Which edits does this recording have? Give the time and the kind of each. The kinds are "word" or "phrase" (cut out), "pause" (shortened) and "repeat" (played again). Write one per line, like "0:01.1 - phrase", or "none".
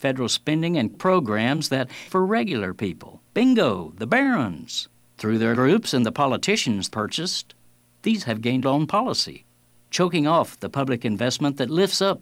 0:00.9 - word
0:02.1 - phrase
0:03.3 - pause
0:04.9 - pause
0:05.5 - phrase
0:06.9 - word
0:08.2 - phrase
0:08.6 - phrase